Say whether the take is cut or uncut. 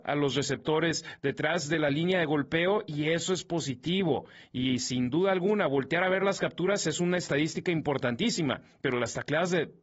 uncut